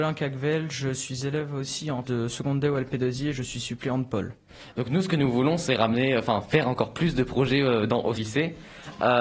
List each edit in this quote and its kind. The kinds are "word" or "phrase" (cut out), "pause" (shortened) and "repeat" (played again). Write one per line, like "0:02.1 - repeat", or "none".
0:02.0 - word
0:08.2 - phrase